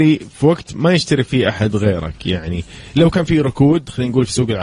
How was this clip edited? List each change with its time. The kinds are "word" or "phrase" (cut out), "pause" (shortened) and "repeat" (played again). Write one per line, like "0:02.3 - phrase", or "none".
none